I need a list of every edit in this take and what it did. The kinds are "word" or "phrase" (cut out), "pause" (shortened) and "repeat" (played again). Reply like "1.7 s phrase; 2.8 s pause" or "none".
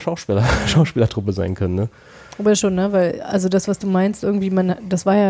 2.6 s word